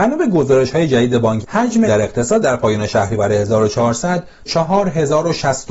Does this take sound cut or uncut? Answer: cut